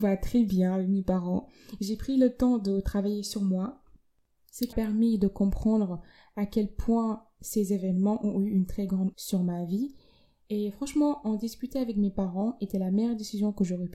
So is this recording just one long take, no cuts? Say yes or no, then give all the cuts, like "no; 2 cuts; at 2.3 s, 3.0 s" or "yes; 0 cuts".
no; 2 cuts; at 4.7 s, 9.1 s